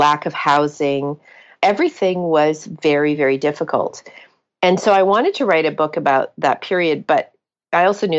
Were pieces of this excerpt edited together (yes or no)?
no